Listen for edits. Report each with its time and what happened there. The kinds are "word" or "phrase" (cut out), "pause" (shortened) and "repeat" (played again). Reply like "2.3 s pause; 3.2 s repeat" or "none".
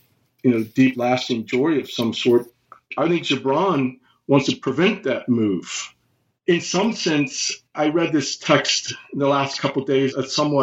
none